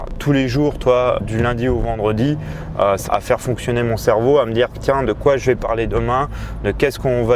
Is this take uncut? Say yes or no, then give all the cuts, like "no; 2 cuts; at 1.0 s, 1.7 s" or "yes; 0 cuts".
no; 2 cuts; at 1.2 s, 3.1 s